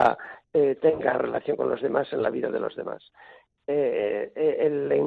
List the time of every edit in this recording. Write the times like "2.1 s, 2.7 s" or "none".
none